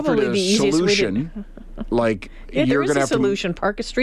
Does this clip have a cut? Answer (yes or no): no